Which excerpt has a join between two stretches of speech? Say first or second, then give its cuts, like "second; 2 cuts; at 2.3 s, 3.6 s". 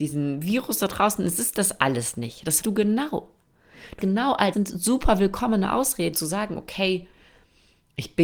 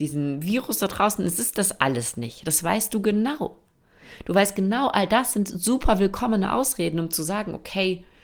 first; 4 cuts; at 2.6 s, 4.0 s, 4.5 s, 6.1 s